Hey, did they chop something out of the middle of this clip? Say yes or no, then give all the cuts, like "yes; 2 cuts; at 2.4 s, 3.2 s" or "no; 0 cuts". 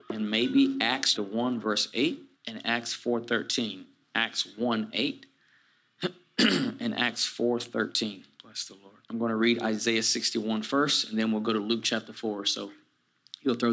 yes; 4 cuts; at 1.1 s, 2.3 s, 8.3 s, 9.0 s